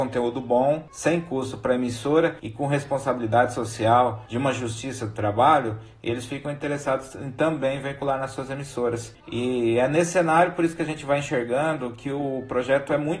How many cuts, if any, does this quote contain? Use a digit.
0